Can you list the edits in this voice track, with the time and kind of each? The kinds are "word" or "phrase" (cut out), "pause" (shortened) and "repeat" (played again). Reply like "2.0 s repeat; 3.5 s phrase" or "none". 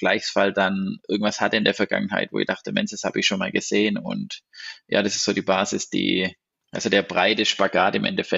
none